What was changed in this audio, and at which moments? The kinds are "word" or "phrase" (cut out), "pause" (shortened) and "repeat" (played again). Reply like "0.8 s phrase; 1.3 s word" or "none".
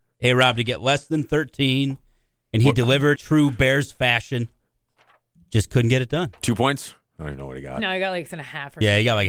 3.1 s word; 8.3 s word

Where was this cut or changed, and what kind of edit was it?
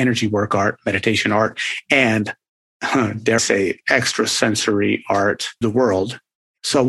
3.4 s word; 5.6 s word

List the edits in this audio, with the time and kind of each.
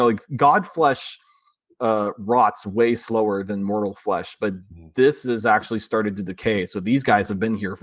none

